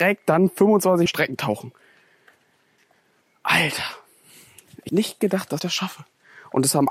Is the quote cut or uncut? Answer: cut